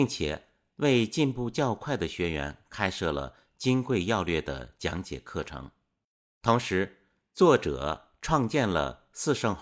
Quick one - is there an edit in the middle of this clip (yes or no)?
no